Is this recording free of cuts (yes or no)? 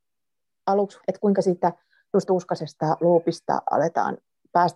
no